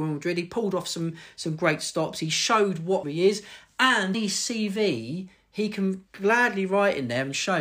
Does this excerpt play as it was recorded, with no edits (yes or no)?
no